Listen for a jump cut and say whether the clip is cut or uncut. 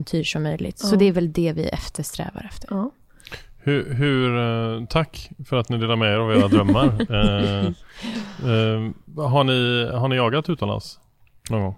uncut